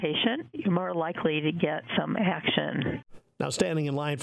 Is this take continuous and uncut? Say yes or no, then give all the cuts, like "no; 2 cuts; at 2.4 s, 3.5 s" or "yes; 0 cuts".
yes; 0 cuts